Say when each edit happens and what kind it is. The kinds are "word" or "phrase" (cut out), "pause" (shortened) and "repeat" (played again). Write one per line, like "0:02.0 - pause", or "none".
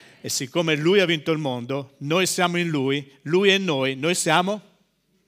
none